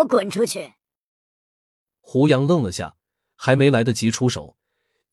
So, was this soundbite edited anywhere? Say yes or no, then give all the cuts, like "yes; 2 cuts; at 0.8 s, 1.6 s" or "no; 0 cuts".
no; 0 cuts